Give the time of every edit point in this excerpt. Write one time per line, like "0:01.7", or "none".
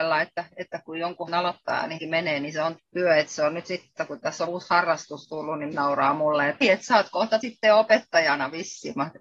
0:01.3
0:02.0
0:02.8
0:04.0
0:04.5
0:05.7
0:06.6
0:07.4